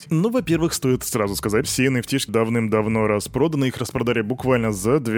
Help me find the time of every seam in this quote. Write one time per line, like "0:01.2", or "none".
0:01.6
0:02.3

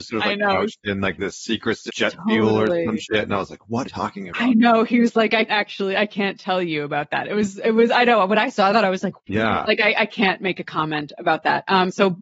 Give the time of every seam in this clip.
0:01.9
0:03.8
0:05.5
0:09.3

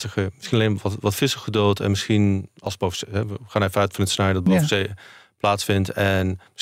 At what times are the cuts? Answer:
none

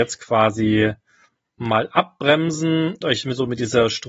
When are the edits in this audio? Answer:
0:03.0

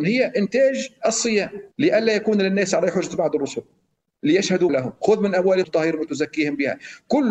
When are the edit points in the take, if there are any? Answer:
0:01.7
0:04.7
0:05.6

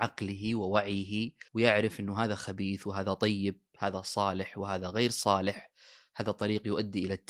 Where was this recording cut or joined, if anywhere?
0:01.5

